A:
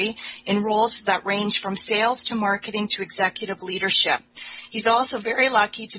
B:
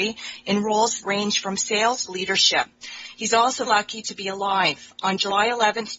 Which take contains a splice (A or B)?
B